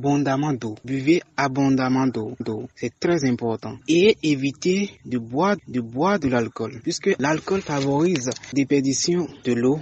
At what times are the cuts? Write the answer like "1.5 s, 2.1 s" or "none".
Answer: 2.4 s, 5.6 s, 8.5 s